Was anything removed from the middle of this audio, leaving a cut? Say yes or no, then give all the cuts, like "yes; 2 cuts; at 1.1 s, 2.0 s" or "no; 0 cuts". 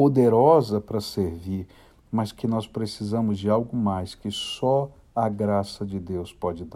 no; 0 cuts